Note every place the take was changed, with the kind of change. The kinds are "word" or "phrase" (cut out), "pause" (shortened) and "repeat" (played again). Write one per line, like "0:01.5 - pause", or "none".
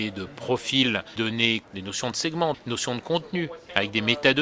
0:01.2 - word
0:01.6 - word
0:02.5 - word